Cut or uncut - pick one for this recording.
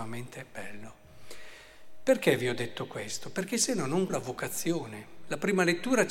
cut